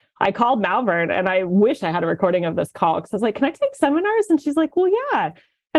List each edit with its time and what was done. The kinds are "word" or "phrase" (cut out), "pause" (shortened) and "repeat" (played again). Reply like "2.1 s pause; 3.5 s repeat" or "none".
none